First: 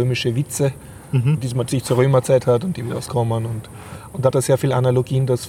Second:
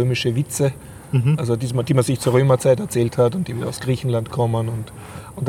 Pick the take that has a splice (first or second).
first